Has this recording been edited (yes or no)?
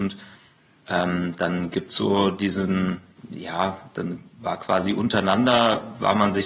no